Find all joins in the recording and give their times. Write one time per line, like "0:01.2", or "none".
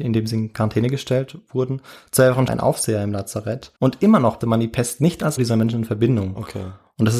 0:02.5
0:03.8
0:04.4
0:05.4

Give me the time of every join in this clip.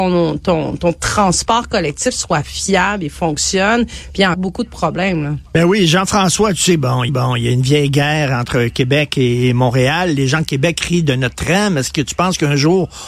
0:04.3
0:07.1

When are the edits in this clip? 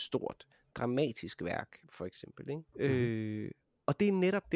0:01.8
0:02.7

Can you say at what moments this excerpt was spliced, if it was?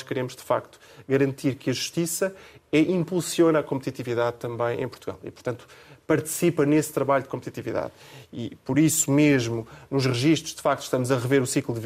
none

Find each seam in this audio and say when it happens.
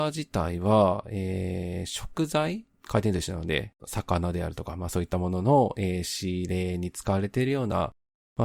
0:02.7
0:03.8

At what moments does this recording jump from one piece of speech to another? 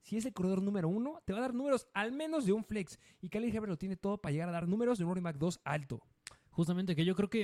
none

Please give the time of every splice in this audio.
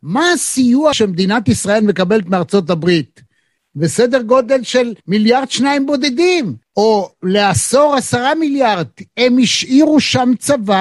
0:00.9
0:05.0
0:06.6

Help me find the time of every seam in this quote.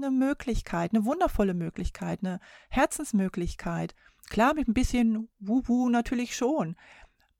none

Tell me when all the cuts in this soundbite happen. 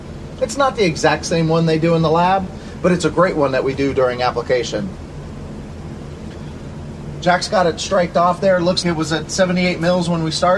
0:08.8

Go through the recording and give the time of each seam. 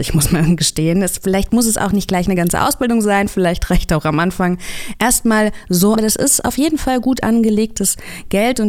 0:05.9

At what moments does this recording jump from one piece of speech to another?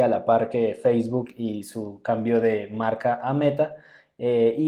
none

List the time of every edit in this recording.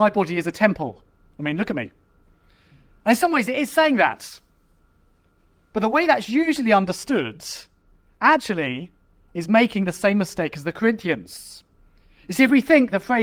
none

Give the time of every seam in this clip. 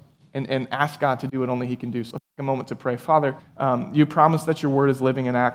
0:02.1
0:03.4

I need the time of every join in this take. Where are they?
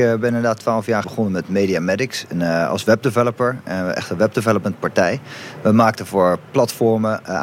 0:01.0

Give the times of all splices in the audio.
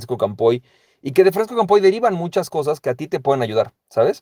none

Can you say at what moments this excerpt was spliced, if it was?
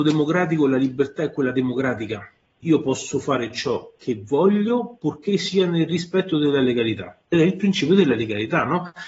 0:02.6

